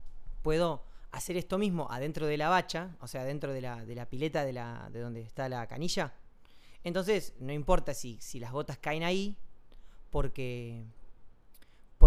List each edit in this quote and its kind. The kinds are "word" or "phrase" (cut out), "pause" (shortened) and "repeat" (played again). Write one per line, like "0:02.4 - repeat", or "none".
none